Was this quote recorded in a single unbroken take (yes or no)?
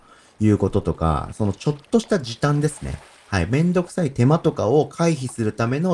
yes